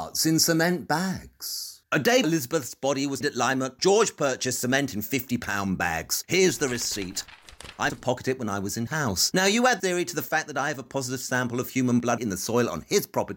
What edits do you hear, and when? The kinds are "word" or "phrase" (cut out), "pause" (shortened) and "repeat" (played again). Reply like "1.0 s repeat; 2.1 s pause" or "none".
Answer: 2.2 s word; 3.2 s word; 3.8 s word; 7.9 s word; 8.9 s word; 9.8 s word; 12.2 s word